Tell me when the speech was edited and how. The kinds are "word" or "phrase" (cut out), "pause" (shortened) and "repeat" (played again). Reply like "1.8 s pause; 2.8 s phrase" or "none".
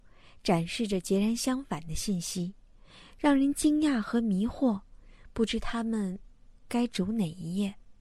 none